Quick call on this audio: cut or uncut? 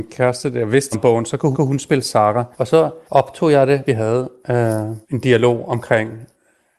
cut